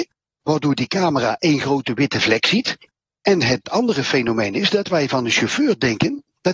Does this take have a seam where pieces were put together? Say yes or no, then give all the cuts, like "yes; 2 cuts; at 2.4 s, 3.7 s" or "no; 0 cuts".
no; 0 cuts